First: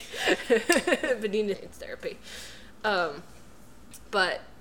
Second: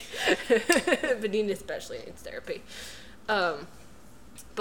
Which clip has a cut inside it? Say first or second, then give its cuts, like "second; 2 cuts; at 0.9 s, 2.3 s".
first; 1 cut; at 1.5 s